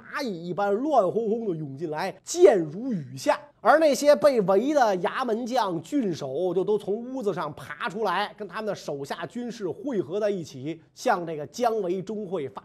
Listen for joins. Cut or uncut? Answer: cut